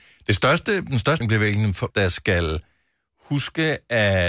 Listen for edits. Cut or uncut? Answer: cut